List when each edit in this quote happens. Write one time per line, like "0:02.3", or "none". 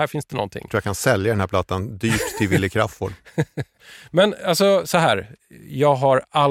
none